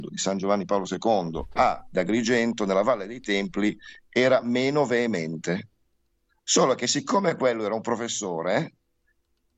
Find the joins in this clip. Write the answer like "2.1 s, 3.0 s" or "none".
none